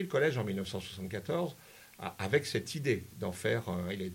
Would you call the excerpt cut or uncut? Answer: uncut